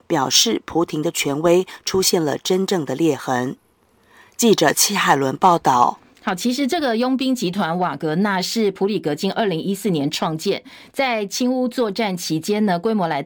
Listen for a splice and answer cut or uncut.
uncut